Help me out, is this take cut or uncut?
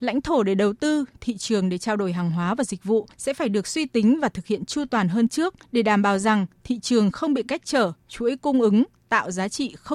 cut